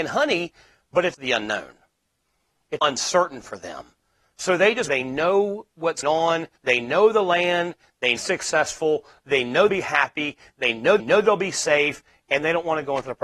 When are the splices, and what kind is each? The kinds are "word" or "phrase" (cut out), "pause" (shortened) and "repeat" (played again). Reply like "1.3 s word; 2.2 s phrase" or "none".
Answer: 1.1 s word; 2.8 s word; 4.9 s phrase; 6.0 s word; 6.6 s pause; 8.2 s phrase; 9.7 s word; 11.0 s repeat

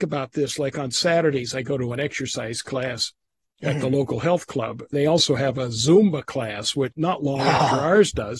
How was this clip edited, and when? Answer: 4.9 s word; 6.9 s word

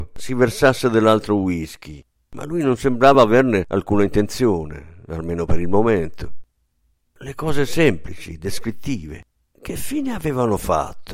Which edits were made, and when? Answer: none

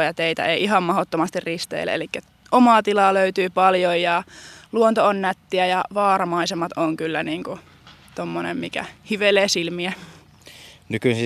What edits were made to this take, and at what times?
none

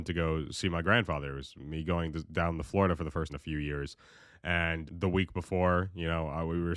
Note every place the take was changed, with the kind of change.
3.3 s word; 4.9 s word

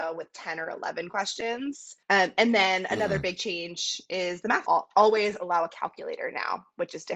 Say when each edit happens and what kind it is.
2.0 s pause; 4.7 s phrase

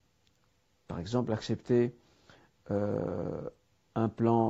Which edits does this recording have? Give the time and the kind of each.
none

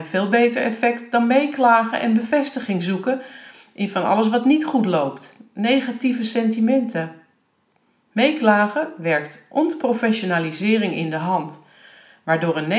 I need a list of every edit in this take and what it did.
none

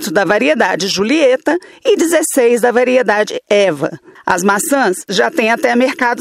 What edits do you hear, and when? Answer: none

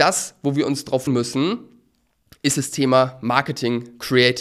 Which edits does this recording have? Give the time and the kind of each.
1.1 s word

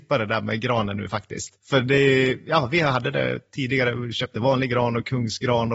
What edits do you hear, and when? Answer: 1.6 s pause

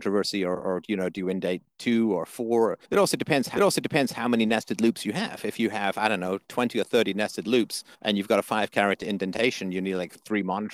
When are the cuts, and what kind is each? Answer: 2.8 s pause; 3.6 s repeat; 7.9 s pause

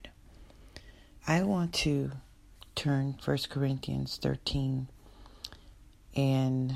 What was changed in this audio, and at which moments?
1.2 s word; 3.2 s word

